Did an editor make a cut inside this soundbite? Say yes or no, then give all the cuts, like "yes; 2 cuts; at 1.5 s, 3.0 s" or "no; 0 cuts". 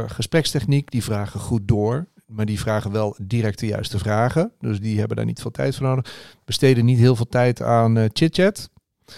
no; 0 cuts